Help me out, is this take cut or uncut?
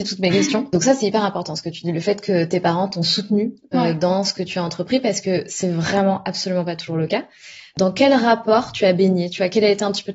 uncut